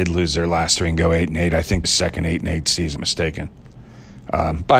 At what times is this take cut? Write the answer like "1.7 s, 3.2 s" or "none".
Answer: 1.8 s, 3.0 s